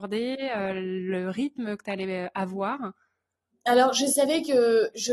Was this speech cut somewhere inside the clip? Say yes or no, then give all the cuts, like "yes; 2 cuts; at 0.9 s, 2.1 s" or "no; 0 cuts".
no; 0 cuts